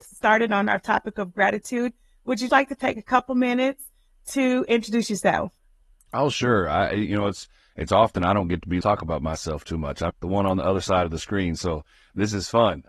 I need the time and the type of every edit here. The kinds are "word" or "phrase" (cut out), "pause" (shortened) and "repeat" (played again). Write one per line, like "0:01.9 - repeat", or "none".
0:02.5 - word
0:08.8 - phrase
0:10.1 - phrase